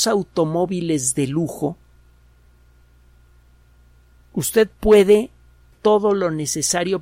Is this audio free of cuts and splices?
no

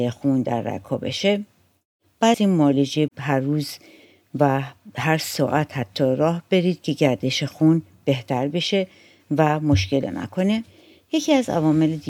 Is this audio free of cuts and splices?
no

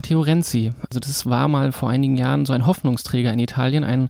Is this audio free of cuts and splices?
yes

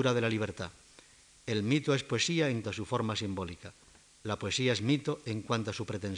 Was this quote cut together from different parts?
yes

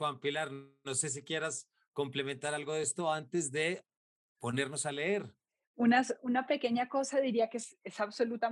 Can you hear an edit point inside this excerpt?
no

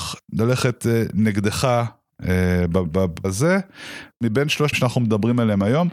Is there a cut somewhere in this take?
yes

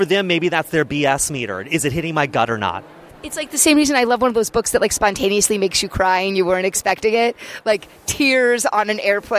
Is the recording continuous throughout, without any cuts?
no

